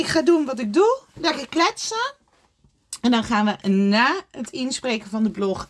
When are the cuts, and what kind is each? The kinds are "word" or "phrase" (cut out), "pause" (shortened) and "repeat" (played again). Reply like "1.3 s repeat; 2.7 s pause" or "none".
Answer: none